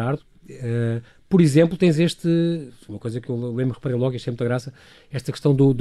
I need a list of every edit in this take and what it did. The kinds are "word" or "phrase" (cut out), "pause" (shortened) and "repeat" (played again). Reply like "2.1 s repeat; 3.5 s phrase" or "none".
none